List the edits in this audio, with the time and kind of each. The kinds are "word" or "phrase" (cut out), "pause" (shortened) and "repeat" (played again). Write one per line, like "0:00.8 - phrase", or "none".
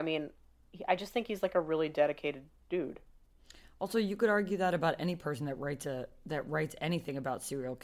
none